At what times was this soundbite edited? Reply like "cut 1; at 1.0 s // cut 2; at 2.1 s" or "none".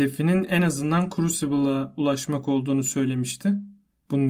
none